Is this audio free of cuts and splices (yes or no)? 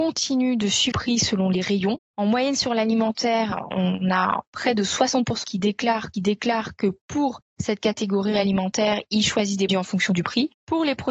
no